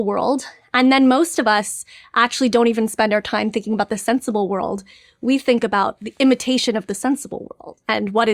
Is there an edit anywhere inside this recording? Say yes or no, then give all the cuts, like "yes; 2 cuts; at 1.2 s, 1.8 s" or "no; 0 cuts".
no; 0 cuts